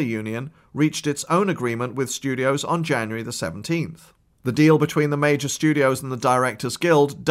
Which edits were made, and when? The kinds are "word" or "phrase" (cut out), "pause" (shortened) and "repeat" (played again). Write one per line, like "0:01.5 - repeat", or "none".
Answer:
none